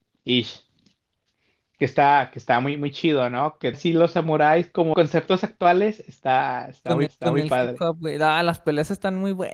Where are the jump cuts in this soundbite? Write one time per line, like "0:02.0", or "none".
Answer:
0:03.7
0:04.9
0:07.1